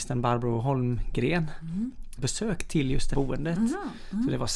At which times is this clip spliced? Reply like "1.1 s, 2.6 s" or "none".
2.2 s, 3.1 s